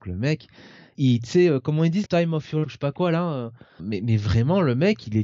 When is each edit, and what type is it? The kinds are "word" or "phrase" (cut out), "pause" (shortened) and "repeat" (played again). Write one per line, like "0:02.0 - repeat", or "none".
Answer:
0:01.0 - word
0:02.0 - word
0:02.6 - word
0:03.8 - word